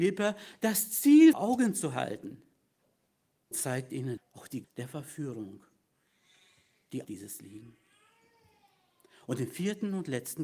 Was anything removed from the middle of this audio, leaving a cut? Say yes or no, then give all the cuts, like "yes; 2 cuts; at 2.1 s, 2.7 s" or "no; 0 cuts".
yes; 6 cuts; at 1.3 s, 3.5 s, 4.2 s, 4.6 s, 7.0 s, 7.4 s